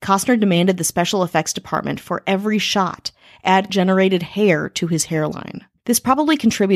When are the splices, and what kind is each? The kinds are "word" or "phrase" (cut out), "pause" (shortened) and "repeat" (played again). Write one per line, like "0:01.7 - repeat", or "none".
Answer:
0:03.7 - word